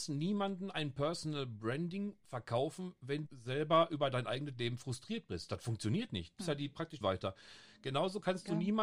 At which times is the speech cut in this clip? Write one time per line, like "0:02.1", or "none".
0:03.3
0:06.4
0:07.0